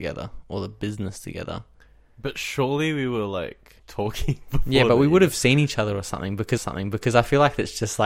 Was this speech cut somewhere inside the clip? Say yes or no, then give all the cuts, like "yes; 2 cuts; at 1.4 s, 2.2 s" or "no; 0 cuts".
yes; 2 cuts; at 3.8 s, 6.6 s